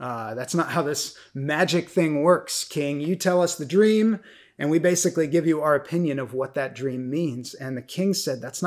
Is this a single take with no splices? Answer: yes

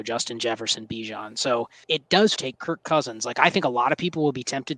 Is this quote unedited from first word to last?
no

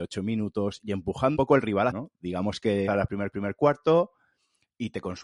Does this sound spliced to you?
yes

